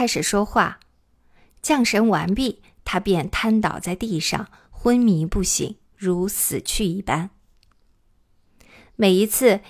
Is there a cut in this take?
no; 0 cuts

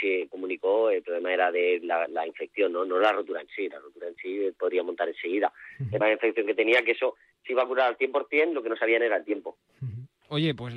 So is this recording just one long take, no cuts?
no; 1 cut; at 6.0 s

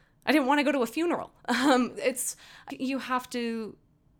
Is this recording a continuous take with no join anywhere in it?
no; 2 cuts; at 1.9 s, 2.7 s

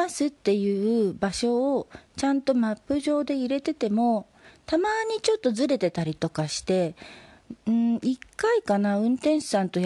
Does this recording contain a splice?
no; 0 cuts

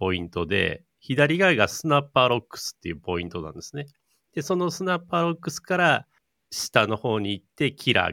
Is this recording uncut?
yes; 0 cuts

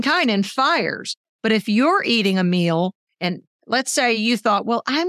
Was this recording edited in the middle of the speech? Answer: no; 0 cuts

